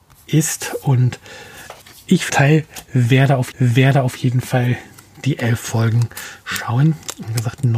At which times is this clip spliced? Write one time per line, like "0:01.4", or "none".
0:01.8
0:02.3
0:03.5